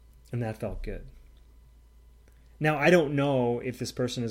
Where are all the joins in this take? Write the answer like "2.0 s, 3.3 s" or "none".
none

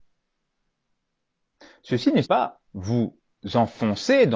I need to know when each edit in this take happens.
2.2 s, 2.7 s

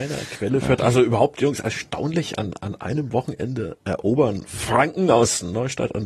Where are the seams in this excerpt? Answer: none

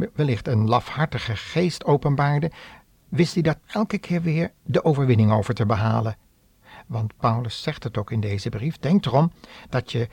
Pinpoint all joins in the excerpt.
3.6 s

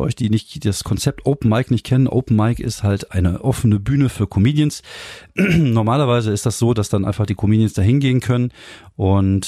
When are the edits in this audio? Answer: none

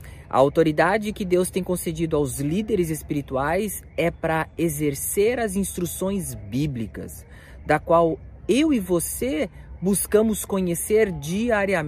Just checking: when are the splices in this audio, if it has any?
none

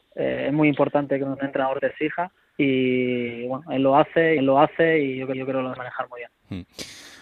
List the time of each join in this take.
1.4 s, 2.4 s, 4.4 s, 5.3 s, 5.8 s

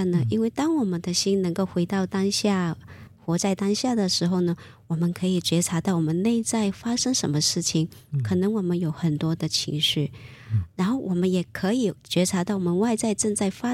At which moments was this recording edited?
none

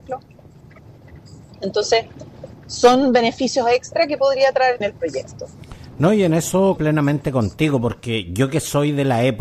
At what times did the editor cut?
2.6 s, 4.8 s, 6.8 s

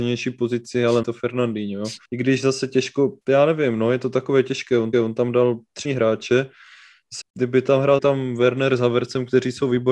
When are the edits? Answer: 1.0 s, 2.0 s, 3.2 s, 4.9 s, 5.8 s, 7.2 s, 8.0 s

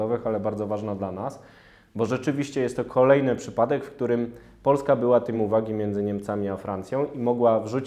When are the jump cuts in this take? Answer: 5.3 s

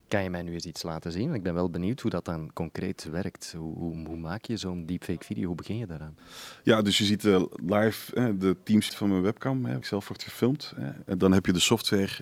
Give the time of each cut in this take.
8.9 s, 9.8 s

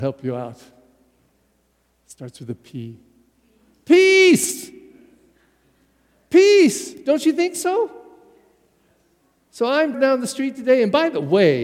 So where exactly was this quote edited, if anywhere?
9.9 s

